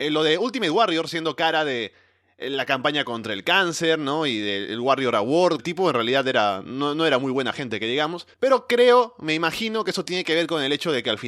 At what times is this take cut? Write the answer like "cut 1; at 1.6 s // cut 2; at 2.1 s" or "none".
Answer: cut 1; at 5.6 s // cut 2; at 8.3 s